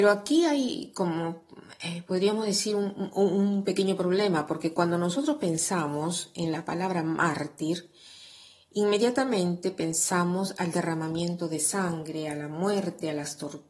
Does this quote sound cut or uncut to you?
uncut